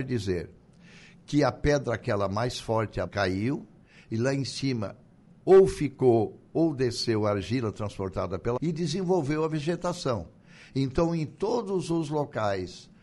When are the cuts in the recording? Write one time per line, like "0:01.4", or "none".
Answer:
0:03.1
0:08.6